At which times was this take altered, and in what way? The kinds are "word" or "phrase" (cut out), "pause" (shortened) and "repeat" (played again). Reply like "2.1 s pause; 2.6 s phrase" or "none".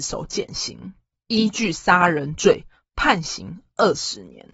none